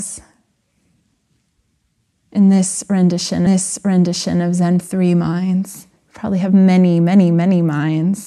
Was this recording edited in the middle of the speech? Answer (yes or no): yes